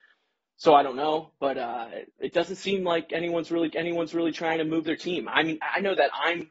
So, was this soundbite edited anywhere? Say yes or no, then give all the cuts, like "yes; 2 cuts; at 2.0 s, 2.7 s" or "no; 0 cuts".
yes; 2 cuts; at 2.1 s, 3.7 s